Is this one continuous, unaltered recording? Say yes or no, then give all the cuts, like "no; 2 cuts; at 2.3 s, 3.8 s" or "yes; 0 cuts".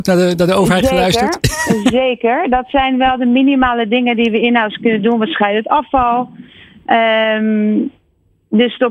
yes; 0 cuts